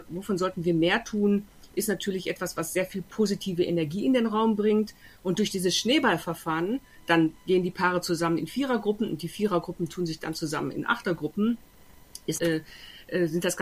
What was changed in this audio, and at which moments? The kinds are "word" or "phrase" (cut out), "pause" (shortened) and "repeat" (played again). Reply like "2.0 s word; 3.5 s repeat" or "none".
12.4 s word